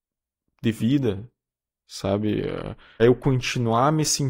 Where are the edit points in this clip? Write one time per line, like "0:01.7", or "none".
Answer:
0:03.0